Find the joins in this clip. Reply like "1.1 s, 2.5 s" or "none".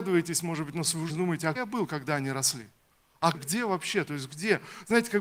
1.1 s, 1.5 s, 3.3 s